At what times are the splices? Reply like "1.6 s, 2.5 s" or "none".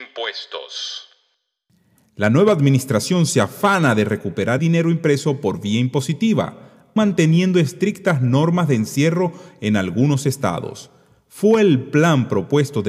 4.6 s, 7.0 s